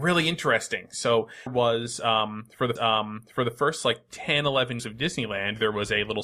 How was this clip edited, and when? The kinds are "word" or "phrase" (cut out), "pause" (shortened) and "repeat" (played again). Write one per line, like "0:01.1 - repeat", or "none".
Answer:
0:01.5 - word
0:02.8 - repeat
0:04.8 - word